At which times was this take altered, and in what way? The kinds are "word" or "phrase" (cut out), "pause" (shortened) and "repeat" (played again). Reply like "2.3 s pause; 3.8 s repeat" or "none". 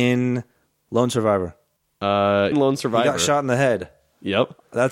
2.5 s phrase